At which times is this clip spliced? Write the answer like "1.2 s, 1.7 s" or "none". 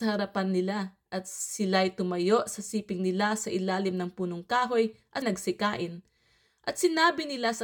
5.2 s